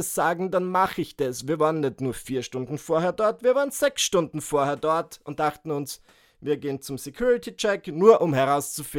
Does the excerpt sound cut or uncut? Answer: uncut